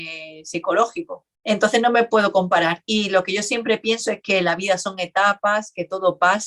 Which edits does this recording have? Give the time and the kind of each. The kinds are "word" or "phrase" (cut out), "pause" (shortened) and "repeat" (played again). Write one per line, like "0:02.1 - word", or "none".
0:01.3 - pause